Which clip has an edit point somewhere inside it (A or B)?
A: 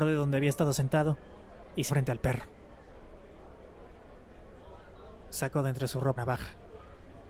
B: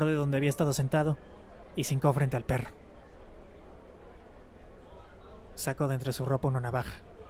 A